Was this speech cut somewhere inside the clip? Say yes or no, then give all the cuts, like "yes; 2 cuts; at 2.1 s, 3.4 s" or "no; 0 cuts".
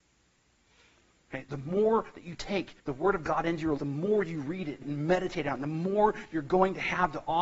yes; 3 cuts; at 2.8 s, 3.8 s, 4.8 s